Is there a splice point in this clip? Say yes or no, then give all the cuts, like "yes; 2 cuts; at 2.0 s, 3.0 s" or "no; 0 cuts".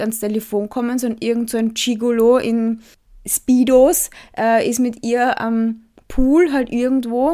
no; 0 cuts